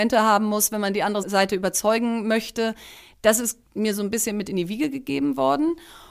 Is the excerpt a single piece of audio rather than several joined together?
no; 1 cut; at 1.2 s

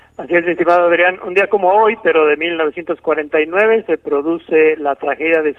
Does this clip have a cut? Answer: no; 0 cuts

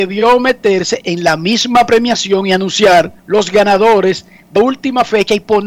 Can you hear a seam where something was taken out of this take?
yes; 2 cuts; at 3.2 s, 4.6 s

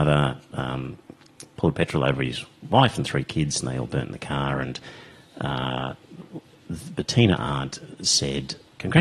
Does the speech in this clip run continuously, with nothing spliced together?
yes; 0 cuts

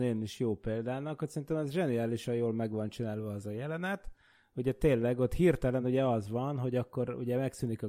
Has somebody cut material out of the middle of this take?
no; 0 cuts

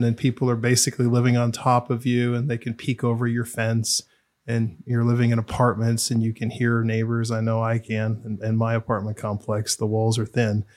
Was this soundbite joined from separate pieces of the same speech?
no; 0 cuts

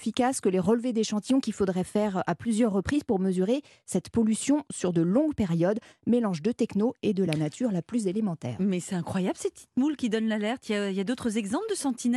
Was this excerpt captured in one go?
yes; 0 cuts

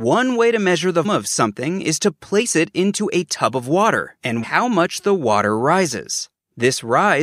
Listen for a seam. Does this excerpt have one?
yes; 2 cuts; at 1.0 s, 4.4 s

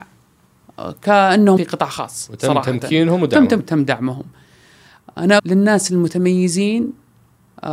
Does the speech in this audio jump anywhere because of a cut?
yes; 3 cuts; at 1.6 s, 3.6 s, 5.4 s

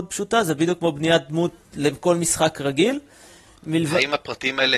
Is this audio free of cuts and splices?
yes; 0 cuts

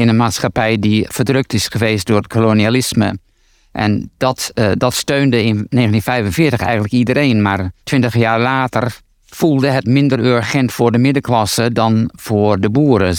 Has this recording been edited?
yes; 2 cuts; at 7.8 s, 9.1 s

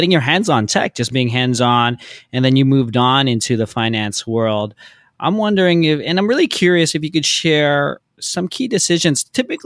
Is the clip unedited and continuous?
yes; 0 cuts

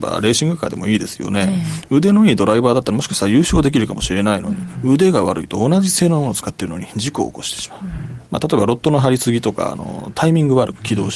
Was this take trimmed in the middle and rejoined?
yes; 1 cut; at 8.3 s

